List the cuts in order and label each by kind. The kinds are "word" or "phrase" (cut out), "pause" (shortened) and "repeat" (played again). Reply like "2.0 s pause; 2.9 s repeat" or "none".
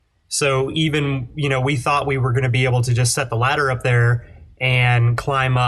none